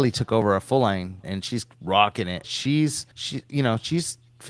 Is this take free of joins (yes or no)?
no